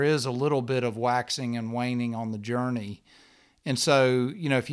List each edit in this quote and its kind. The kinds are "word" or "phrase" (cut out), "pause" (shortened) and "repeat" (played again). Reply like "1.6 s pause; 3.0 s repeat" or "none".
none